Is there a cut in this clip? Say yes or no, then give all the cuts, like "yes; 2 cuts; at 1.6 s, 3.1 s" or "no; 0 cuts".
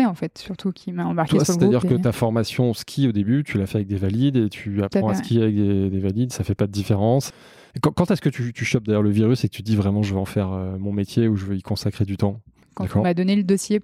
no; 0 cuts